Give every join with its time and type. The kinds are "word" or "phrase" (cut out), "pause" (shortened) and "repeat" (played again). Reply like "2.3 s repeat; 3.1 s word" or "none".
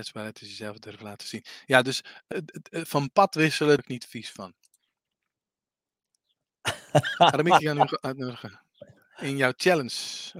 2.3 s word; 3.8 s phrase

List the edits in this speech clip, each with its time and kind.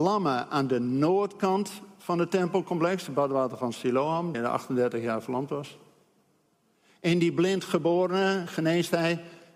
4.3 s phrase

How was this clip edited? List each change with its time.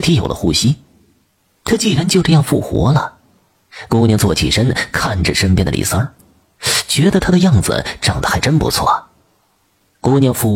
none

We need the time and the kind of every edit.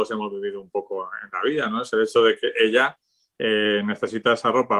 none

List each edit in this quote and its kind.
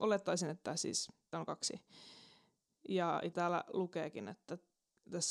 1.3 s word; 3.3 s word

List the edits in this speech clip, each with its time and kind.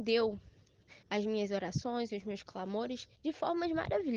1.0 s pause; 3.1 s pause

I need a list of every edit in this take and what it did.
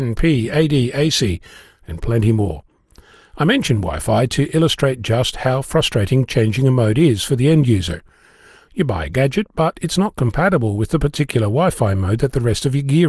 none

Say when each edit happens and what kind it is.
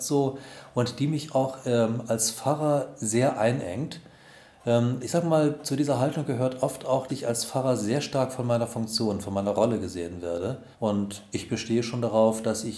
7.1 s word; 10.7 s pause

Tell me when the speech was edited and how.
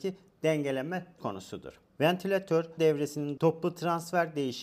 1.2 s word; 2.8 s word; 3.4 s word

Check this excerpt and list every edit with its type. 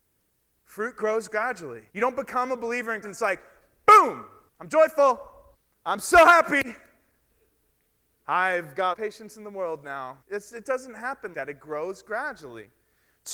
1.9 s pause; 3.0 s word; 4.5 s pause; 5.5 s pause; 8.9 s phrase; 10.2 s pause; 11.3 s word

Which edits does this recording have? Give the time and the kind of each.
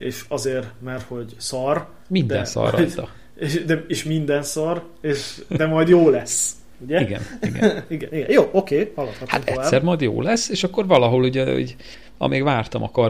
none

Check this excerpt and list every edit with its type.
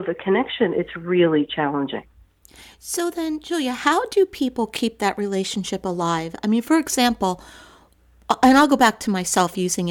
none

